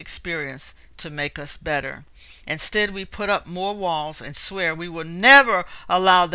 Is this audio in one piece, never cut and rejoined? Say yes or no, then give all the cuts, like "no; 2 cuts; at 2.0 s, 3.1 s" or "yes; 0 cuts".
yes; 0 cuts